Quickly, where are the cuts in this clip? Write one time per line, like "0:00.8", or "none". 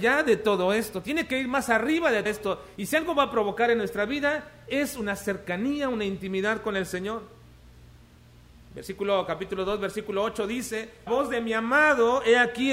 0:02.3
0:11.1